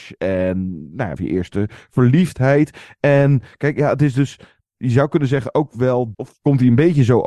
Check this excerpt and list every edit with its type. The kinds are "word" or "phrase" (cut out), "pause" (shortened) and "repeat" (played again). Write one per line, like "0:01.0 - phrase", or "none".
0:01.2 - phrase
0:06.1 - word